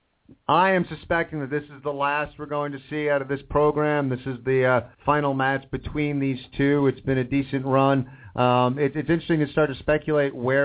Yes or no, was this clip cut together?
yes